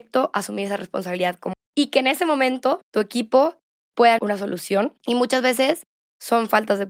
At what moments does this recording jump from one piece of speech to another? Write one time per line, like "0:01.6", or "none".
0:01.5
0:02.8
0:04.2
0:05.0